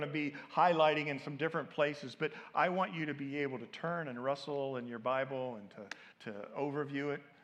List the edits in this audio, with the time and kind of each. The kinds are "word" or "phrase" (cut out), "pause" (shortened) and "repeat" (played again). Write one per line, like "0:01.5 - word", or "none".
0:06.1 - pause